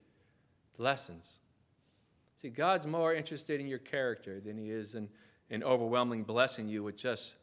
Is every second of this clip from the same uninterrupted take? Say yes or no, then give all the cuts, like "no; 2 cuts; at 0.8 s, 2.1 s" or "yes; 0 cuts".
yes; 0 cuts